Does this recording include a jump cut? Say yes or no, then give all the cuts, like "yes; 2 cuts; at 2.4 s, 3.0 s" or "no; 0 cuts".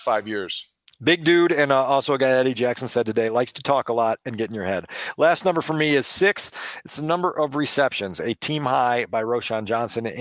no; 0 cuts